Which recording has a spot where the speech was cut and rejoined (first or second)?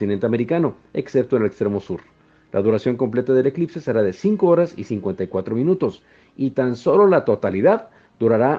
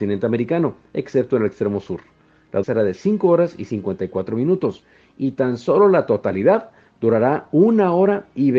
second